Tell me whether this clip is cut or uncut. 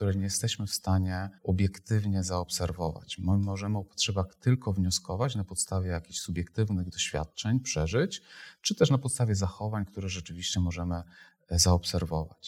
cut